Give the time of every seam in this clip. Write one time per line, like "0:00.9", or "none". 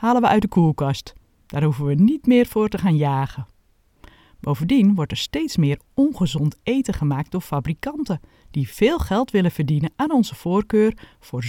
none